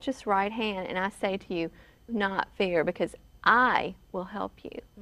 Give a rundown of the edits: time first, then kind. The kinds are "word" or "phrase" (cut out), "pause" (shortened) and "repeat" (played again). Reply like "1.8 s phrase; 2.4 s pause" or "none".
2.1 s word

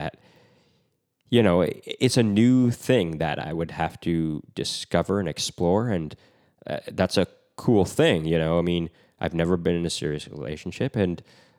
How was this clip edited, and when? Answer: none

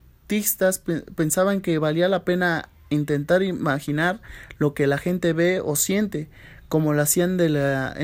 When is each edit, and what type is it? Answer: none

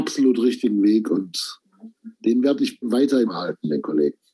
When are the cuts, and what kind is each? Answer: 2.2 s pause; 2.8 s word; 3.3 s phrase

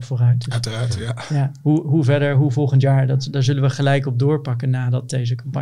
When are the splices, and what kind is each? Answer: none

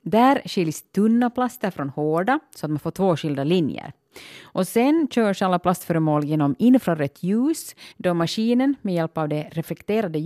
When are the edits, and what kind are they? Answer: 7.9 s pause

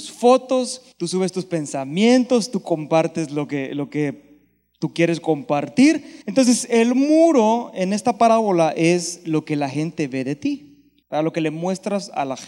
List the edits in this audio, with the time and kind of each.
0.9 s pause; 6.2 s pause; 11.0 s pause

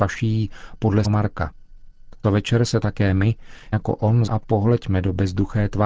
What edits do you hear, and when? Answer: 1.0 s word; 2.2 s word; 3.7 s word; 4.3 s word

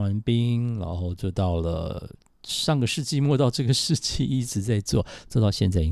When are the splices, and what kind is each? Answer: none

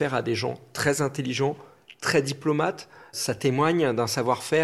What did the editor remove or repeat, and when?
none

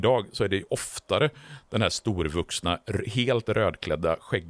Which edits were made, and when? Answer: none

